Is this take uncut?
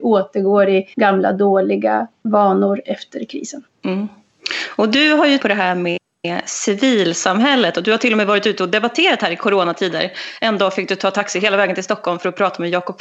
no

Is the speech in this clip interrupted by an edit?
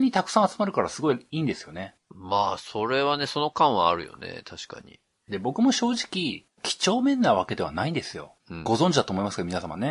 yes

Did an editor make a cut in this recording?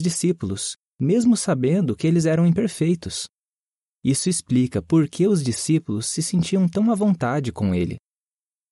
no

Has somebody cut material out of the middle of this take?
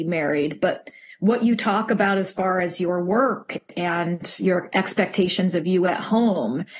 no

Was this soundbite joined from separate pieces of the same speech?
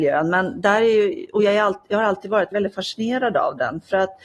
yes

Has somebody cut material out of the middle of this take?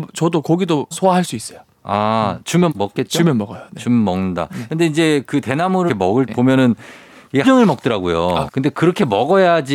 yes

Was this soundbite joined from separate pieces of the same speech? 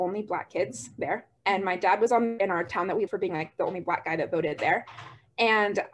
yes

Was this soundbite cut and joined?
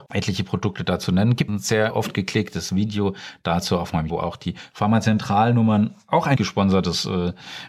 yes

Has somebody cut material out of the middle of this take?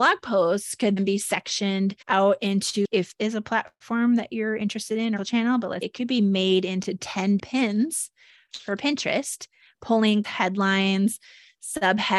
yes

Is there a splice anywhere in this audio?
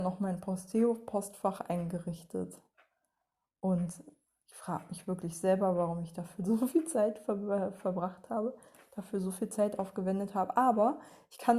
no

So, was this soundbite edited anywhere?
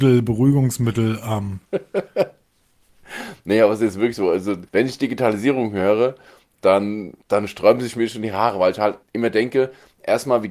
yes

